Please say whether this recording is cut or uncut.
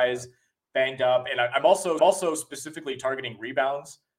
cut